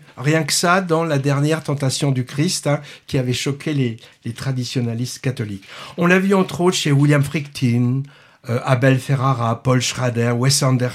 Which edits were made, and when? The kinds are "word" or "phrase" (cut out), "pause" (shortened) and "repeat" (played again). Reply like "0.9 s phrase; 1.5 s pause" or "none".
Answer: none